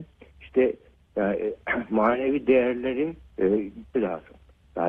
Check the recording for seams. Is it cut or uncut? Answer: cut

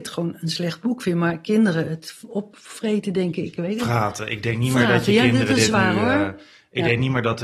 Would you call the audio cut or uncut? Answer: uncut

